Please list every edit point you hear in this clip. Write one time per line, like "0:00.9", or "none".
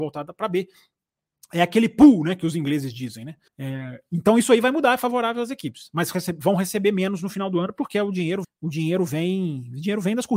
0:03.5
0:08.4